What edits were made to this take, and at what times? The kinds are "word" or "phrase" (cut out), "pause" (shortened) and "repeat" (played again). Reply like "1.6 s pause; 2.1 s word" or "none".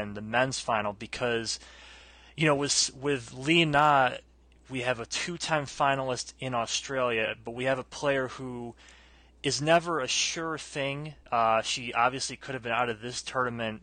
none